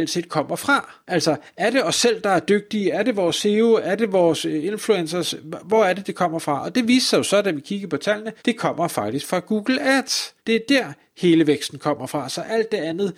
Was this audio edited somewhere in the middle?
yes; 3 cuts; at 1.0 s, 8.4 s, 10.4 s

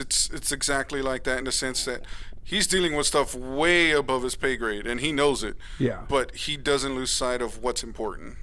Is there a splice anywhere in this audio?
no; 0 cuts

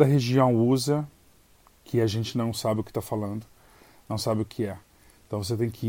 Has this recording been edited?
no; 0 cuts

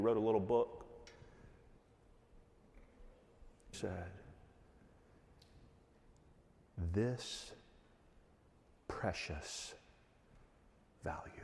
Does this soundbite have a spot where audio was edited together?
yes; 1 cut; at 3.7 s

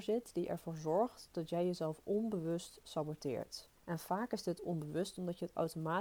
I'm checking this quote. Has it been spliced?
yes; 1 cut; at 3.8 s

